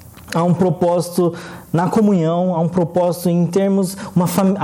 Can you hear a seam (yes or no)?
no